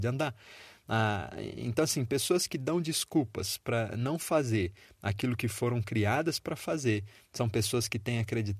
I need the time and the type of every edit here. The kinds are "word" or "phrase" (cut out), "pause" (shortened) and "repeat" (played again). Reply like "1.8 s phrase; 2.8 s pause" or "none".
none